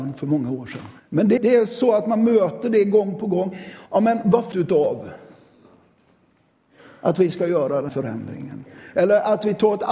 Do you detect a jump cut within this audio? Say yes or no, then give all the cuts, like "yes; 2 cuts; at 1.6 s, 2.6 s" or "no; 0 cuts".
yes; 5 cuts; at 1.0 s, 1.4 s, 3.9 s, 4.5 s, 7.9 s